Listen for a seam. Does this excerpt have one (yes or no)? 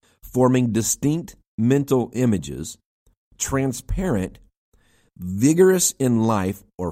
no